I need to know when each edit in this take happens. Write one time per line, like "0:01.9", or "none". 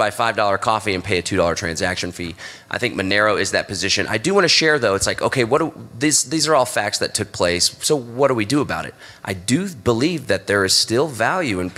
none